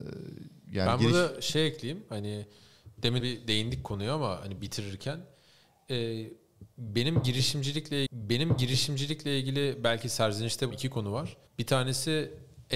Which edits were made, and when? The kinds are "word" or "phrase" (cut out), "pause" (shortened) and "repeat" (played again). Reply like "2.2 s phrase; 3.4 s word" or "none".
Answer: 3.2 s word; 8.1 s repeat; 10.7 s word; 11.5 s pause